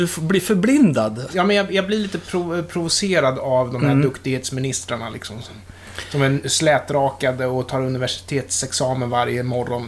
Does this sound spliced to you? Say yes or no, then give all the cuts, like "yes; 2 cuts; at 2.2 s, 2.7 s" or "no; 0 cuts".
no; 0 cuts